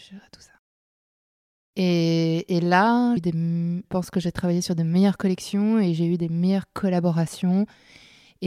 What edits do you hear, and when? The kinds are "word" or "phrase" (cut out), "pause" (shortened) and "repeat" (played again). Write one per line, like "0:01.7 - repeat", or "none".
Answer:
0:03.2 - word
0:03.8 - word